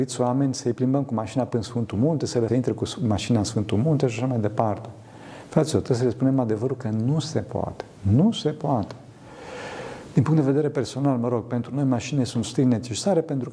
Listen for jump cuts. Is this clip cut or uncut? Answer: cut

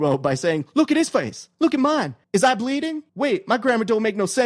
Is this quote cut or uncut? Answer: cut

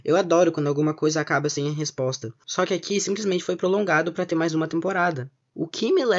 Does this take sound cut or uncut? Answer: uncut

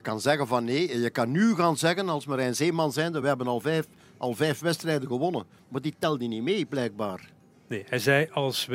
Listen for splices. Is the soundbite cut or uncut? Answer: uncut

